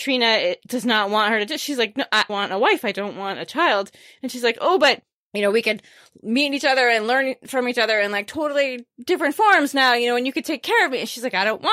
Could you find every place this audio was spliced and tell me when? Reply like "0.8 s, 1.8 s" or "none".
2.3 s